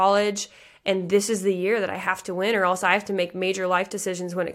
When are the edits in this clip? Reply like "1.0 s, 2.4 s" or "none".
none